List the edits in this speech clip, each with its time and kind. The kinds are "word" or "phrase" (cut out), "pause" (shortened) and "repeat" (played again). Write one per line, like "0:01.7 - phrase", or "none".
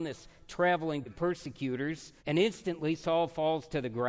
0:01.1 - word
0:02.2 - pause